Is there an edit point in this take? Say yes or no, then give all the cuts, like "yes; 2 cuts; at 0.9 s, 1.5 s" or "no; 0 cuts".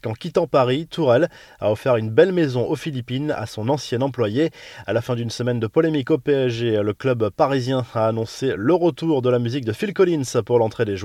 no; 0 cuts